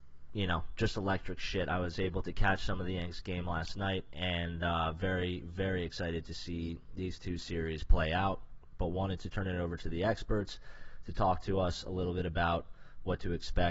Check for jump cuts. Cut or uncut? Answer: uncut